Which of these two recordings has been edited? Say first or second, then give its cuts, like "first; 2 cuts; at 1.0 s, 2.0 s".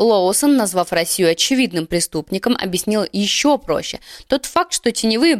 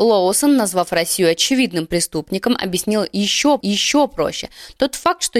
second; 1 cut; at 3.6 s